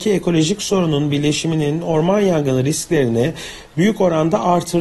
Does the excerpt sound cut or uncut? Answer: uncut